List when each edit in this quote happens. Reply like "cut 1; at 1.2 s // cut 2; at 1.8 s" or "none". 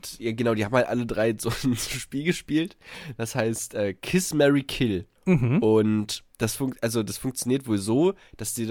cut 1; at 5.2 s // cut 2; at 6.3 s